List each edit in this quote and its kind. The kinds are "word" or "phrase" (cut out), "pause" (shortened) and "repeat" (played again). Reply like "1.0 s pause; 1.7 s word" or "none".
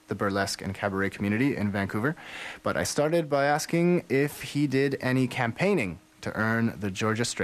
none